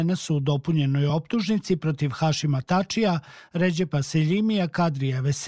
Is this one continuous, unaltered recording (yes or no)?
yes